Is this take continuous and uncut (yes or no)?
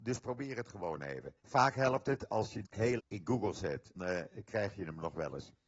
no